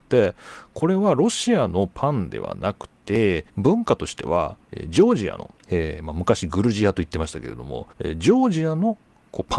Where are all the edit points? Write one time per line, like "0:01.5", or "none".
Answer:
0:03.5
0:04.6
0:05.6
0:07.9